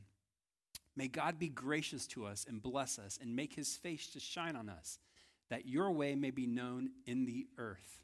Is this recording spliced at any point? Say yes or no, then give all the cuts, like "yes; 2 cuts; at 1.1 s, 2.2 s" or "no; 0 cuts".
no; 0 cuts